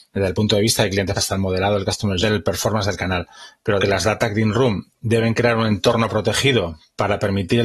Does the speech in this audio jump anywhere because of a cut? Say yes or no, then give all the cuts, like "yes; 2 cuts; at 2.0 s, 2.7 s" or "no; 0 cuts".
yes; 3 cuts; at 1.2 s, 2.2 s, 3.8 s